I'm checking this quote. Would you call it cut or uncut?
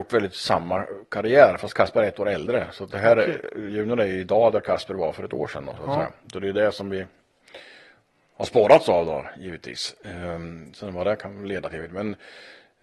uncut